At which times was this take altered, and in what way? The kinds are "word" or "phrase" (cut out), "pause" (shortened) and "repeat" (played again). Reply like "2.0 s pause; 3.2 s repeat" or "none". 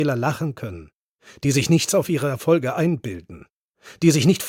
none